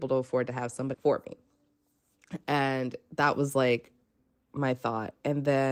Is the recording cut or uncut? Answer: cut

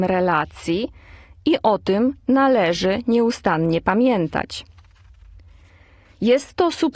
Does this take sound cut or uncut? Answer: uncut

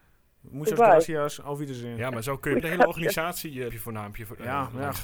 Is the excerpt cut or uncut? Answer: cut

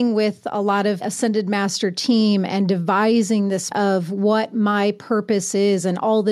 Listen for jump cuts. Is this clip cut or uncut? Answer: cut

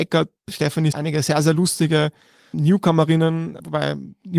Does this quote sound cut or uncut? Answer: cut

